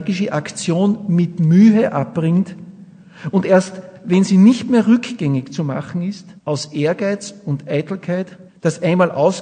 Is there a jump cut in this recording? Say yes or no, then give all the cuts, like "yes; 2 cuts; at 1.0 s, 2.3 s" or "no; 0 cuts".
yes; 2 cuts; at 6.4 s, 8.5 s